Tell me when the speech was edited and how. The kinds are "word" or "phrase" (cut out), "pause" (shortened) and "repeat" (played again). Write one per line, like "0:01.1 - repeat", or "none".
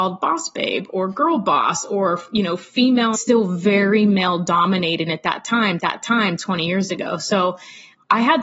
0:03.1 - phrase
0:05.1 - word
0:05.8 - repeat